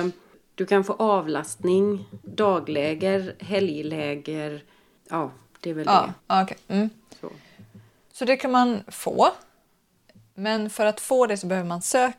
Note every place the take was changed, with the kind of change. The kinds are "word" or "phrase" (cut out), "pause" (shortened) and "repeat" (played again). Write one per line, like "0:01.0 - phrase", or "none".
0:06.2 - pause